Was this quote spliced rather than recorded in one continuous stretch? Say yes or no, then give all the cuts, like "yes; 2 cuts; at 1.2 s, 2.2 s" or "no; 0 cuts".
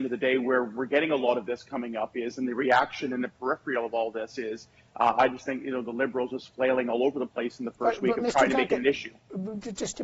no; 0 cuts